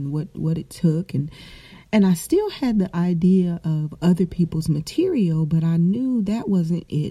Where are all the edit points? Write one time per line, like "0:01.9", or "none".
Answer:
none